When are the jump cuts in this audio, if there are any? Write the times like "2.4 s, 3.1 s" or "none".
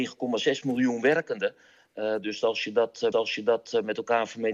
3.1 s